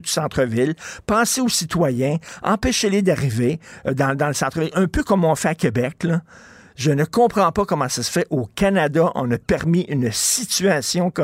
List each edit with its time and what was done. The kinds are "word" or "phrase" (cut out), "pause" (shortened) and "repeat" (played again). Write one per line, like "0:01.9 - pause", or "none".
none